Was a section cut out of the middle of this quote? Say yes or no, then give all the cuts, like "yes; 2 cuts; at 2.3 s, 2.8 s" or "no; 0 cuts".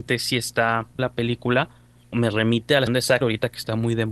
yes; 4 cuts; at 1.0 s, 2.1 s, 2.9 s, 3.2 s